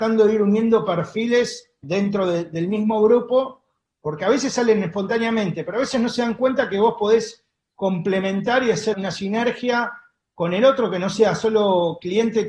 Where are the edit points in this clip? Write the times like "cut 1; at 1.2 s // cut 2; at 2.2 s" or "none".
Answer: cut 1; at 1.8 s // cut 2; at 8.9 s

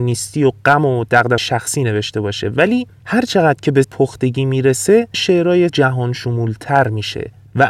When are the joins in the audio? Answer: cut 1; at 1.4 s // cut 2; at 3.8 s // cut 3; at 5.1 s // cut 4; at 5.7 s

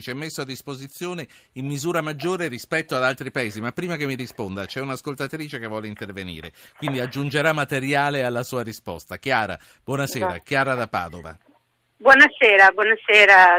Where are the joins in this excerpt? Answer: none

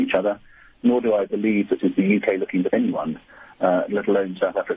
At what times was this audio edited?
cut 1; at 1.8 s // cut 2; at 2.7 s

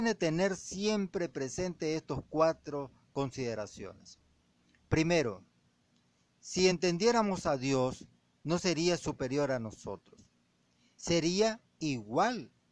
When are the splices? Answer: none

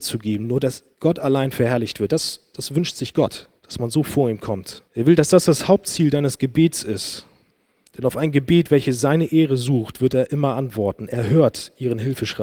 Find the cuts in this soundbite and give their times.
cut 1; at 0.9 s // cut 2; at 3.6 s // cut 3; at 4.9 s // cut 4; at 7.5 s

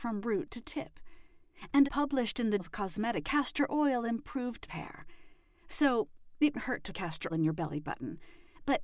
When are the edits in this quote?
cut 1; at 1.8 s // cut 2; at 2.6 s // cut 3; at 3.2 s // cut 4; at 4.7 s // cut 5; at 6.5 s // cut 6; at 6.9 s // cut 7; at 7.3 s

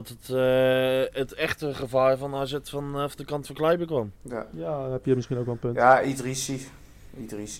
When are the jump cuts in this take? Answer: cut 1; at 4.2 s

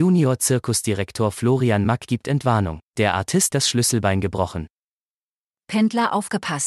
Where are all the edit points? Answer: cut 1; at 2.9 s // cut 2; at 3.5 s

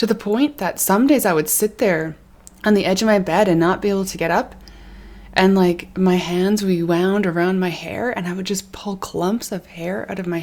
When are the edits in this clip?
cut 1; at 2.3 s

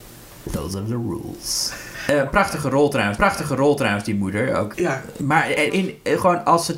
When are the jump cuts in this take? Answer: cut 1; at 3.2 s // cut 2; at 4.7 s // cut 3; at 5.7 s

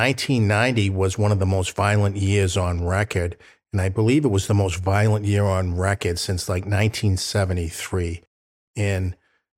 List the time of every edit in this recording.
none

